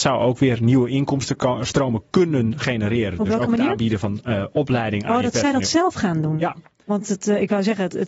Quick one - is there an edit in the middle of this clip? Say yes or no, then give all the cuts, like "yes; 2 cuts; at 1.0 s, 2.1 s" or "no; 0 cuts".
no; 0 cuts